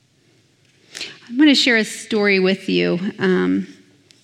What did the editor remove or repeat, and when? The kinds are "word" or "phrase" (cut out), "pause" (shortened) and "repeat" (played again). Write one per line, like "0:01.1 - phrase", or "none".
none